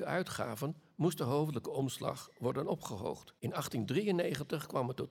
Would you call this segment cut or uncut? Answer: cut